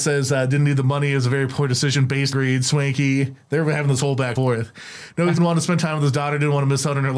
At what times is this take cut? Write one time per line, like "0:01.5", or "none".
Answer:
0:02.3
0:04.4
0:05.4